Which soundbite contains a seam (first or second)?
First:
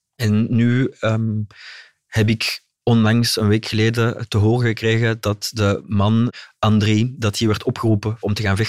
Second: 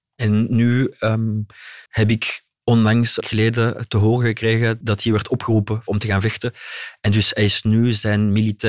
second